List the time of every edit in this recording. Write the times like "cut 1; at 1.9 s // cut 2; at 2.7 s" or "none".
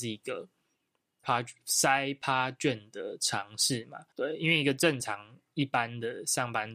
cut 1; at 1.2 s // cut 2; at 4.1 s